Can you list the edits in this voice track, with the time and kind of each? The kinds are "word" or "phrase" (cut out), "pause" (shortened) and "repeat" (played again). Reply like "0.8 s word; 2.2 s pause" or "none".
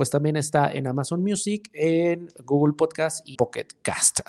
3.3 s word